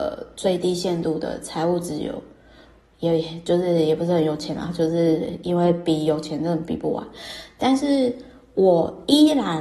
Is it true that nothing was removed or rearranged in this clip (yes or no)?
yes